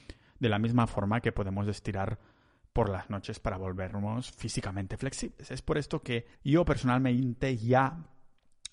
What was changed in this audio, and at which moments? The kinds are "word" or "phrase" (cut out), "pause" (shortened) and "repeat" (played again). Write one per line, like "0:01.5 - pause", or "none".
0:06.3 - pause

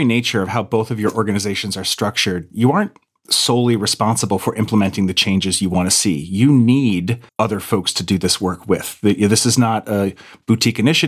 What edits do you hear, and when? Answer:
0:07.3 - pause

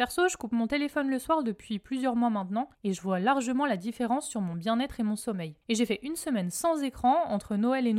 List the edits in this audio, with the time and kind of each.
0:02.7 - pause
0:05.6 - pause

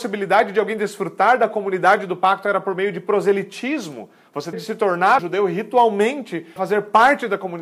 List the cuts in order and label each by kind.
0:04.5 - word
0:05.2 - word
0:06.6 - word

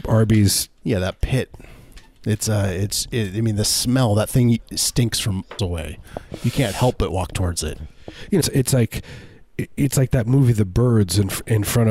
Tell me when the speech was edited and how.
0:05.6 - word
0:08.4 - word

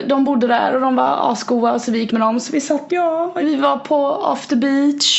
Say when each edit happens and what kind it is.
0:02.1 - word
0:02.9 - word
0:03.4 - word

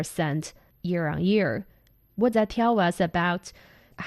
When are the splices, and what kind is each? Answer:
0:02.3 - word

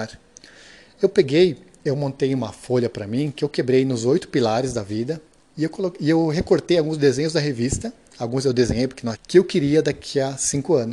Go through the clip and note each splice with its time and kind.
0:09.1 - word

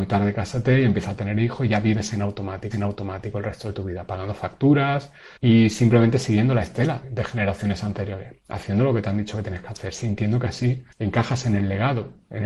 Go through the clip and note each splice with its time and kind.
0:02.7 - repeat
0:05.4 - pause
0:07.0 - word
0:10.9 - pause

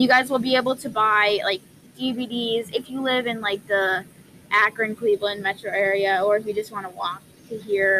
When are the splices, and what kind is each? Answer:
none

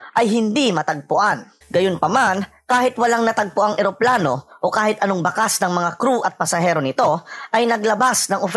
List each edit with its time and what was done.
0:01.6 - pause

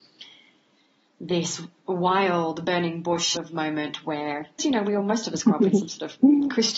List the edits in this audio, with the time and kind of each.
0:03.3 - word
0:04.6 - word

